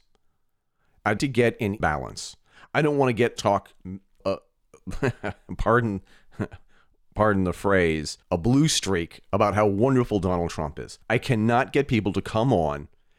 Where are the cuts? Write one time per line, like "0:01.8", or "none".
0:01.2
0:01.8
0:03.4
0:04.2
0:08.2
0:11.0